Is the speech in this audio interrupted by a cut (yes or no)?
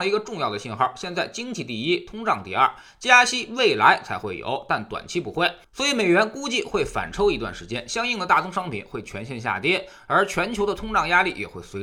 no